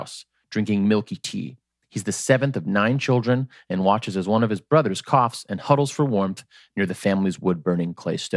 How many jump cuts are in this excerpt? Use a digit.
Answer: 0